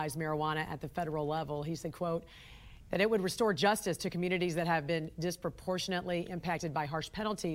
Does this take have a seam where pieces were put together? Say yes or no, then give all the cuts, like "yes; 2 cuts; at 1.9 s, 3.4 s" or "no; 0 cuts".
no; 0 cuts